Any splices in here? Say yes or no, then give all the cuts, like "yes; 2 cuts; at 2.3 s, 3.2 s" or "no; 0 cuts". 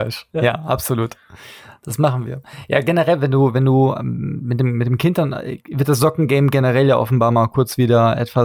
no; 0 cuts